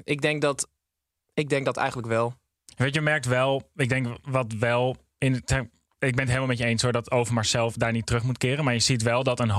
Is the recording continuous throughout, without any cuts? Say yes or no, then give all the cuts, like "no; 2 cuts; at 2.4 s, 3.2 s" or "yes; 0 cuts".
yes; 0 cuts